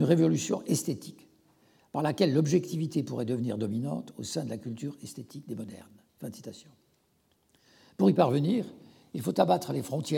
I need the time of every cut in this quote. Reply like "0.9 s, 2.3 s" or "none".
6.1 s